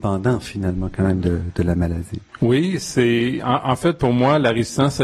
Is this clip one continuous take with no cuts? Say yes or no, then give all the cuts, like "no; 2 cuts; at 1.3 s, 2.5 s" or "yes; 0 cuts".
no; 1 cut; at 2.3 s